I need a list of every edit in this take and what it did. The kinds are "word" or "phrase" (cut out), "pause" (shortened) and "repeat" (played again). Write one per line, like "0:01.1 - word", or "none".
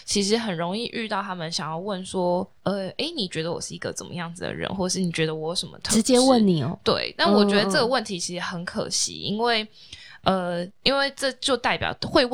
0:02.6 - pause